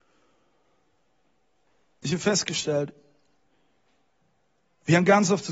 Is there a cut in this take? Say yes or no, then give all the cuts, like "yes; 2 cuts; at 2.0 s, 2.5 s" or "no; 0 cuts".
no; 0 cuts